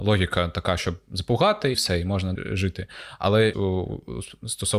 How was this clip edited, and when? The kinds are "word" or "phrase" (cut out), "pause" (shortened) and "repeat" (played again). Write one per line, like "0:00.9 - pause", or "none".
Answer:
0:01.7 - phrase
0:02.4 - word
0:03.5 - word